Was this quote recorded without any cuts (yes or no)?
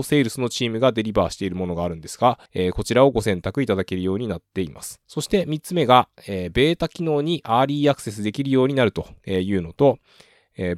no